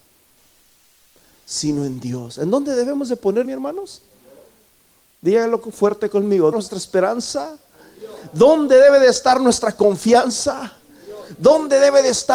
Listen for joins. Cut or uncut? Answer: cut